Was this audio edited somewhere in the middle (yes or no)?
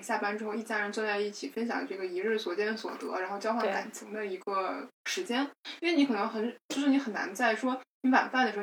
yes